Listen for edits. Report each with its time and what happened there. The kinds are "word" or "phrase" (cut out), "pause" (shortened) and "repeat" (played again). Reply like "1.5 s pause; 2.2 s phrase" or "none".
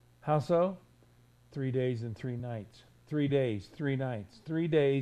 none